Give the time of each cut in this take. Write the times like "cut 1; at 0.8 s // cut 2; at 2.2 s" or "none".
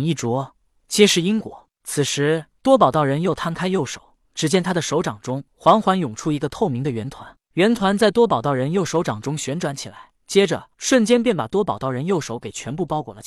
cut 1; at 2.6 s // cut 2; at 4.2 s // cut 3; at 5.5 s // cut 4; at 10.1 s // cut 5; at 10.7 s